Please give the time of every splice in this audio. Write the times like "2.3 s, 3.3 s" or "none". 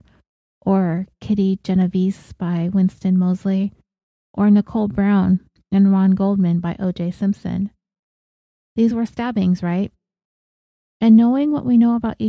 none